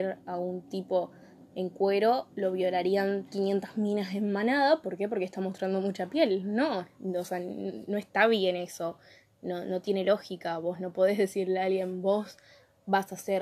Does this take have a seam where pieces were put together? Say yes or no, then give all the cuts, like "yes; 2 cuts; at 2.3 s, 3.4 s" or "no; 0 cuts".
no; 0 cuts